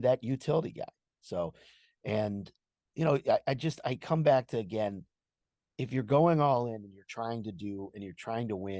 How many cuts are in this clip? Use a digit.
0